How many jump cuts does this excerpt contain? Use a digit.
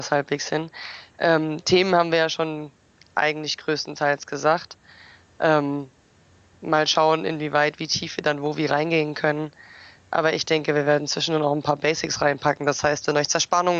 0